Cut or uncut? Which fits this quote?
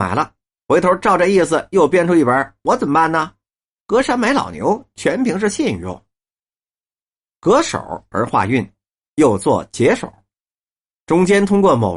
uncut